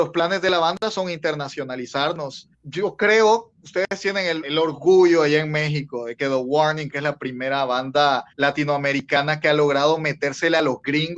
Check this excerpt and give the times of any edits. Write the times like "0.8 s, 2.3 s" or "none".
2.5 s, 4.4 s, 6.9 s, 8.3 s